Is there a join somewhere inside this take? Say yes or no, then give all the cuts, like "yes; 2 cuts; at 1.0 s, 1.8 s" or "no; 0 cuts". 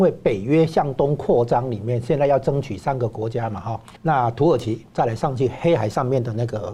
yes; 1 cut; at 4.0 s